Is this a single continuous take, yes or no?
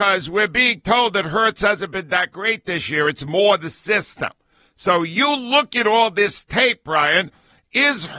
yes